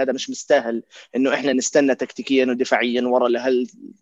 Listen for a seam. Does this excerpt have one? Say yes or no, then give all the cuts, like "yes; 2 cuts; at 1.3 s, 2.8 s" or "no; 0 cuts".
no; 0 cuts